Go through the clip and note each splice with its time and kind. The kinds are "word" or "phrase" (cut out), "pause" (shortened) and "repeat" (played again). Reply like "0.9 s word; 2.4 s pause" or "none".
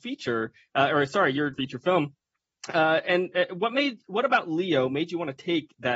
1.5 s phrase